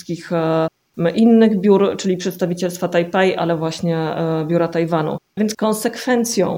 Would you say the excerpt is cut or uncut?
cut